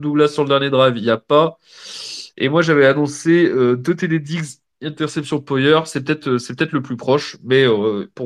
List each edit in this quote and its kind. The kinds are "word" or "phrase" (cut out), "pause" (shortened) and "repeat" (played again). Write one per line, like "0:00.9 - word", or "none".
0:04.7 - pause

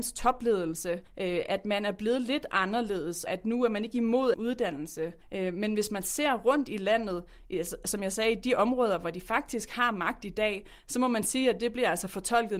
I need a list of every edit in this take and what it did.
0:01.1 - pause
0:03.3 - word
0:04.3 - phrase
0:05.2 - pause

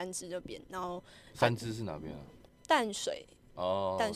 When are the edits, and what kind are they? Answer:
none

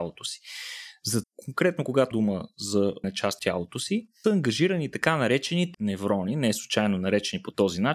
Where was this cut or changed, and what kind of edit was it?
0:01.2 - word
0:02.1 - word
0:03.0 - word
0:03.4 - word
0:04.2 - word
0:05.7 - word

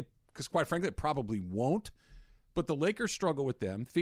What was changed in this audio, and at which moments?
none

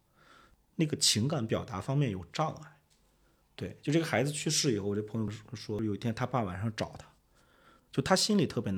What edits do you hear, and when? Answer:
none

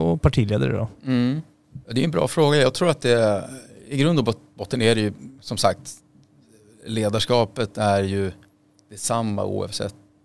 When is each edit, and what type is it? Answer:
0:01.8 - pause
0:05.4 - pause

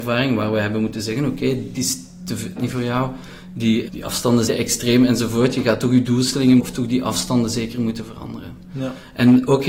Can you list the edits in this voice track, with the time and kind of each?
0:01.7 - word
0:02.6 - phrase
0:03.9 - word
0:04.5 - word
0:06.6 - phrase

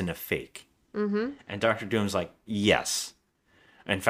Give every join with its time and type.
none

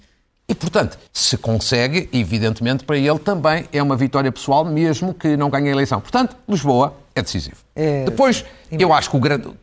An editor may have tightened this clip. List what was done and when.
0:01.1 - pause

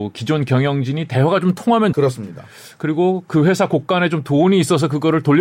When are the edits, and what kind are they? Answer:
0:01.9 - word

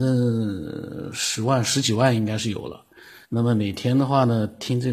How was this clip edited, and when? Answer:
0:03.2 - pause

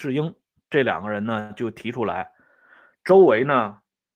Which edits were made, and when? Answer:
none

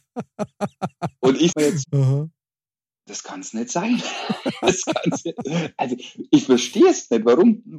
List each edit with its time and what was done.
0:01.5 - phrase
0:01.8 - word

